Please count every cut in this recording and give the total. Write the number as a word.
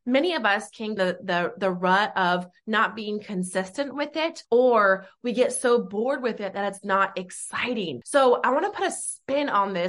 one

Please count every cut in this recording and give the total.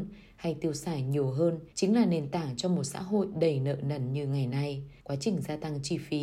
two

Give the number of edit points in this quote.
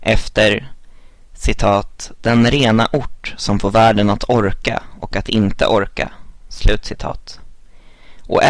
zero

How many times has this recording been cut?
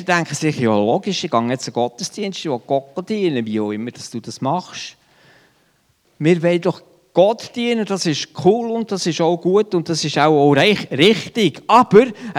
zero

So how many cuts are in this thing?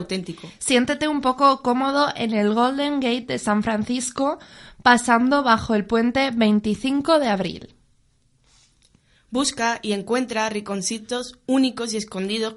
zero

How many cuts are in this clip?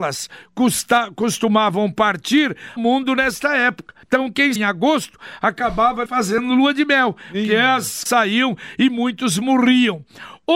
five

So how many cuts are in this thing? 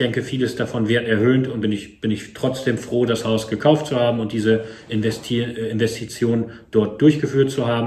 one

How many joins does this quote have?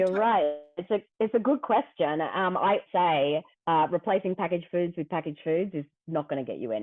two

